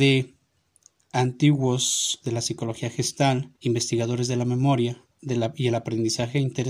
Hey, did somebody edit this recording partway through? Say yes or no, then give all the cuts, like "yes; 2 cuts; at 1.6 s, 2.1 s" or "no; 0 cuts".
yes; 3 cuts; at 2.2 s, 3.6 s, 5.1 s